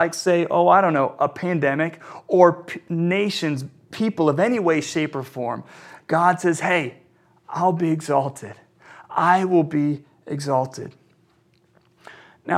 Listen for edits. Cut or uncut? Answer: uncut